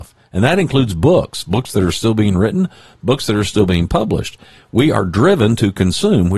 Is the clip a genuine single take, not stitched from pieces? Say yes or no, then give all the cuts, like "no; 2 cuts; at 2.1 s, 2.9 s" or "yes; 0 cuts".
yes; 0 cuts